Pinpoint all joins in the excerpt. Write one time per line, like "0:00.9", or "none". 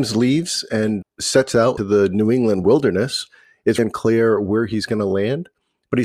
0:01.0
0:01.8
0:03.8